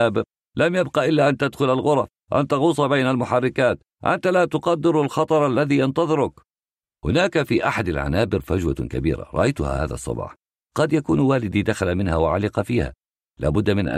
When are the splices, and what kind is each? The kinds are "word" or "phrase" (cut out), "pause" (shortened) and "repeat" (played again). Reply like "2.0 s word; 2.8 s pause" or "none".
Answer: none